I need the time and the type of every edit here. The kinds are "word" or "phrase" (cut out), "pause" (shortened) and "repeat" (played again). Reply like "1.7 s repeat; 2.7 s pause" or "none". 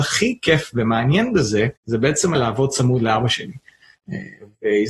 1.8 s pause; 2.3 s word